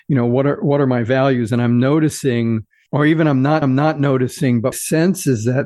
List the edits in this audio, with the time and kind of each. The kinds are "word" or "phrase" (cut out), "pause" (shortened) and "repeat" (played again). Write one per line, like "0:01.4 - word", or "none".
0:03.6 - repeat
0:04.7 - word